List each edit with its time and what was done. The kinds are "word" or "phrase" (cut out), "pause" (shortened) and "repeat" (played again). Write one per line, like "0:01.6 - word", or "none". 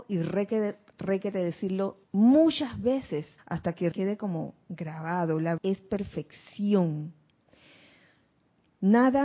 0:02.0 - pause
0:03.4 - pause
0:03.9 - word
0:05.6 - word